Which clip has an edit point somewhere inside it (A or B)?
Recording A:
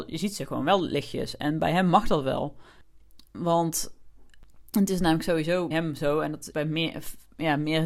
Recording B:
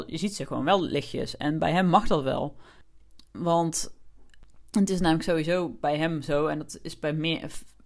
A